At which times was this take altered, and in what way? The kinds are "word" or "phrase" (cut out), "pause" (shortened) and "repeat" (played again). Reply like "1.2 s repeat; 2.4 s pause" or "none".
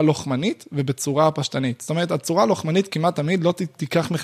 none

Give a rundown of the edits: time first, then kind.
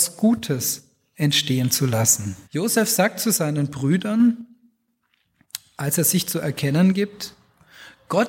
2.4 s pause

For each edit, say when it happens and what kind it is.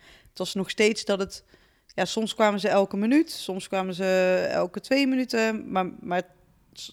none

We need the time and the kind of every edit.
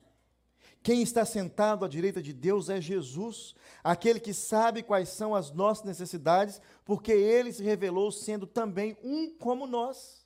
none

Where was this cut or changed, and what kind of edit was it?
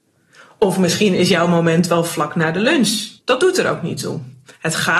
3.2 s pause

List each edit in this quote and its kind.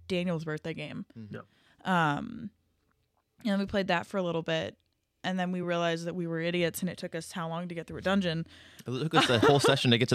none

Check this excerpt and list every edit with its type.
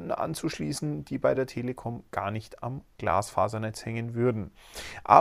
none

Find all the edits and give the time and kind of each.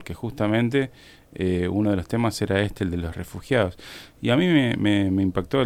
none

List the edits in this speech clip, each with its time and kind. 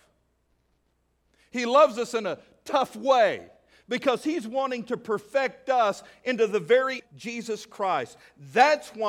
7.0 s phrase

